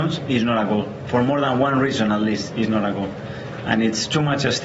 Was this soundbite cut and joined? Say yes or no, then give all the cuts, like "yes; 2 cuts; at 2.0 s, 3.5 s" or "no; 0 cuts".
no; 0 cuts